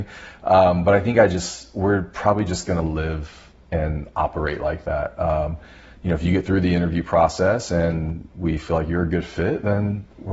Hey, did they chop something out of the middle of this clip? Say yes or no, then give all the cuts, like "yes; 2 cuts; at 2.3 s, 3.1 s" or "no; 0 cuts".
no; 0 cuts